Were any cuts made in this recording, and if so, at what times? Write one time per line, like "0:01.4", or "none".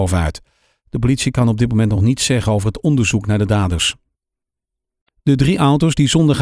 none